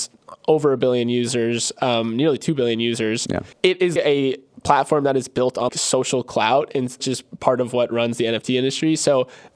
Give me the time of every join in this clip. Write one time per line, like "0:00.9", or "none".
0:03.5
0:04.0
0:05.7
0:07.0